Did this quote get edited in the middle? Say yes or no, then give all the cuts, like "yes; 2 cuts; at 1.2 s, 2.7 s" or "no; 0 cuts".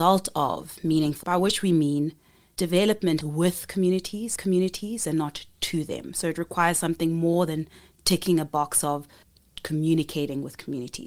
yes; 3 cuts; at 1.2 s, 3.2 s, 4.4 s